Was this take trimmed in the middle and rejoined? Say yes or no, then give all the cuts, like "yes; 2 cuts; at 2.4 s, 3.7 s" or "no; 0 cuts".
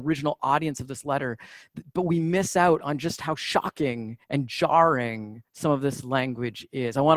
yes; 2 cuts; at 4.2 s, 5.5 s